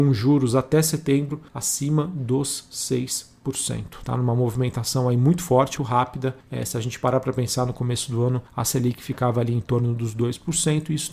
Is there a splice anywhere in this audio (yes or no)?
yes